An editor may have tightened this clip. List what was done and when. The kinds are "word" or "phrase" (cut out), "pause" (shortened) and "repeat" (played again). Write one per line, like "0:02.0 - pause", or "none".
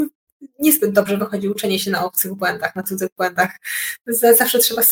none